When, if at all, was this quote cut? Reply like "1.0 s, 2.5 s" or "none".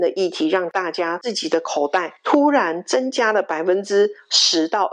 2.2 s